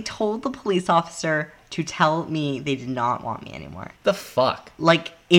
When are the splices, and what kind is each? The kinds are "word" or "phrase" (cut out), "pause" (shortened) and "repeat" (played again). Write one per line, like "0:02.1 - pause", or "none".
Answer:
0:04.0 - pause

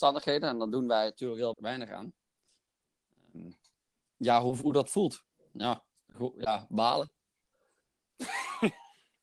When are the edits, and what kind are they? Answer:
0:01.5 - word
0:03.7 - pause

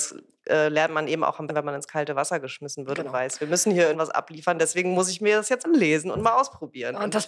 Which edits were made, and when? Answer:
0:01.5 - word
0:03.9 - phrase
0:05.6 - word

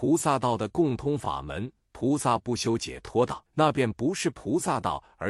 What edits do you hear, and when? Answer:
0:03.5 - pause

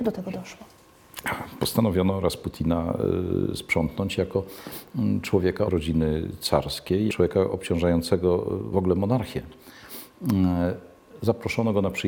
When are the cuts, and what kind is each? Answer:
0:05.7 - phrase
0:07.1 - word

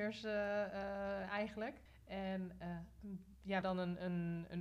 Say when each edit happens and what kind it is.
0:01.9 - pause
0:03.6 - word

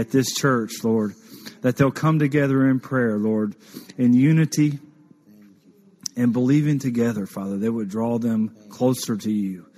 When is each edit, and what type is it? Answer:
none

